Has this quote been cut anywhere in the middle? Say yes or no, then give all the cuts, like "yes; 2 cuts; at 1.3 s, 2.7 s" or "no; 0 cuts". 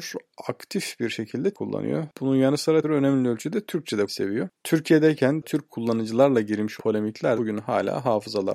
yes; 6 cuts; at 1.5 s, 2.8 s, 4.1 s, 5.4 s, 6.8 s, 7.4 s